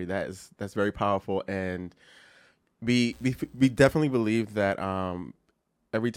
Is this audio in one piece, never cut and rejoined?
yes; 0 cuts

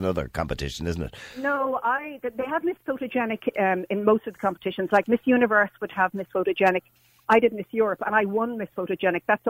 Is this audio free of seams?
no; 1 cut; at 3.5 s

